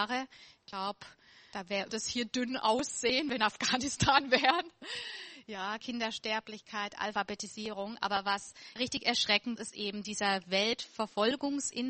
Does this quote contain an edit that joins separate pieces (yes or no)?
yes